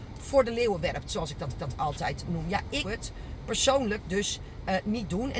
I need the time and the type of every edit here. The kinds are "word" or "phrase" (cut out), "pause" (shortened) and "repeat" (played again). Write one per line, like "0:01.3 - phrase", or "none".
0:01.5 - repeat
0:02.8 - word